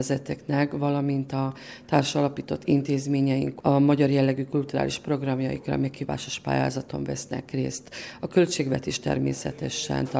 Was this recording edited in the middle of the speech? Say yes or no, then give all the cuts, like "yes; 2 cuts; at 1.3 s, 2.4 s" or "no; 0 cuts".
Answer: no; 0 cuts